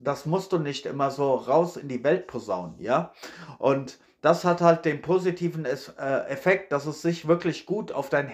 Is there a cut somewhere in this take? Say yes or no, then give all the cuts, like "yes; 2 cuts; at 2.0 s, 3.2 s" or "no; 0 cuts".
no; 0 cuts